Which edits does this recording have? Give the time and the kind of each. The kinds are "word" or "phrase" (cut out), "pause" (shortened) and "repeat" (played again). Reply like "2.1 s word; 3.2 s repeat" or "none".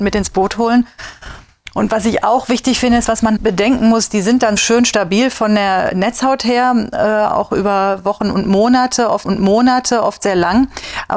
3.4 s word; 4.6 s word; 9.3 s repeat